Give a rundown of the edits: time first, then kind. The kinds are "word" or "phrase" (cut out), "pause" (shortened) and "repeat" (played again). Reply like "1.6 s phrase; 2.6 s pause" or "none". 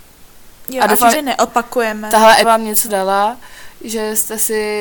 1.1 s word; 2.4 s word; 2.9 s word